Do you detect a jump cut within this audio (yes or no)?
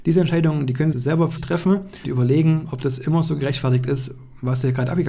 yes